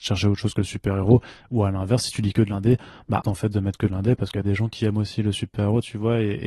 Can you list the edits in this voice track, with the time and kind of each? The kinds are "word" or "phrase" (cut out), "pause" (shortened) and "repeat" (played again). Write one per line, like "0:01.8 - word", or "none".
0:03.2 - word